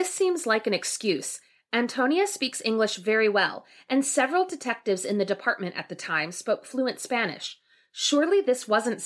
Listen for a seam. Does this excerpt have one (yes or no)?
no